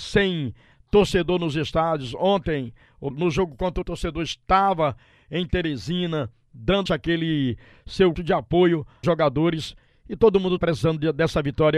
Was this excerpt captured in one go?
no; 6 cuts; at 3.1 s, 3.8 s, 6.9 s, 8.1 s, 9.0 s, 10.6 s

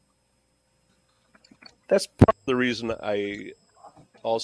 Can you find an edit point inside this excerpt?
no; 0 cuts

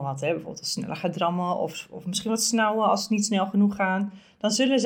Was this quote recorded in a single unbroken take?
yes; 0 cuts

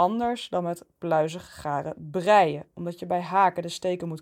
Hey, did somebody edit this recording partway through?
no; 0 cuts

